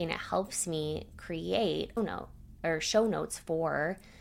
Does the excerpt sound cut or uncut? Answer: cut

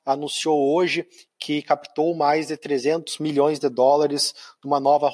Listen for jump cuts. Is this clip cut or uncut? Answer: uncut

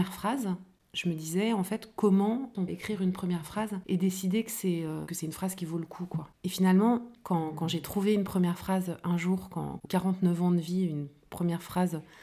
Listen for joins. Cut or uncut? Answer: cut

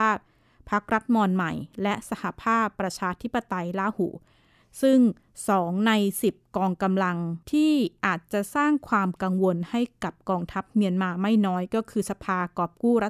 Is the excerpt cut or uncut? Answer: cut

